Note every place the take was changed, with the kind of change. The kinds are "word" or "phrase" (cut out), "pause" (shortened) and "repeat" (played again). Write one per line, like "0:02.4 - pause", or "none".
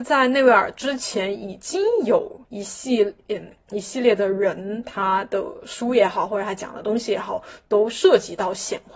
0:02.4 - pause